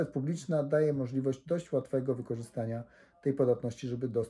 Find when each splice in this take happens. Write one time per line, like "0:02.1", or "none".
none